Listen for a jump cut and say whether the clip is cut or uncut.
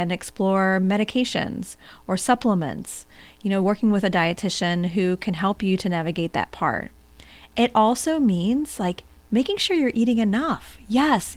uncut